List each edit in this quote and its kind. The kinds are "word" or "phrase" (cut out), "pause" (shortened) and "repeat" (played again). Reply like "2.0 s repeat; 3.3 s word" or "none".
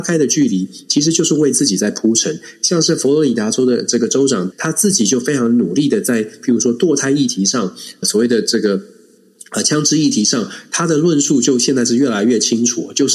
4.5 s word; 8.0 s word